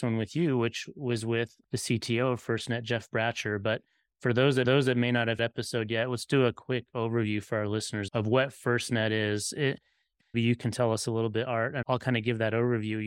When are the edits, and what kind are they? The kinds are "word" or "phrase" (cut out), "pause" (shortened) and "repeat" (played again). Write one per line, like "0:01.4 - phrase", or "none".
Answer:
0:04.6 - repeat
0:05.4 - phrase
0:08.1 - word
0:10.3 - phrase
0:11.8 - word